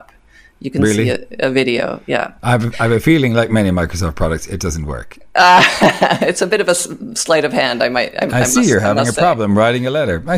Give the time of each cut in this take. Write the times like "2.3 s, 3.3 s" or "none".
none